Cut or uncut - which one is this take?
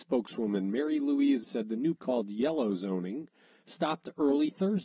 cut